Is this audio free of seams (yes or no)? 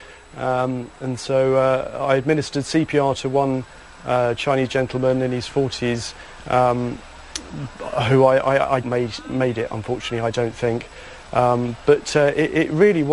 no